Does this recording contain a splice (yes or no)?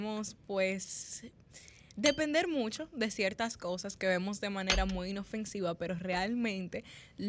no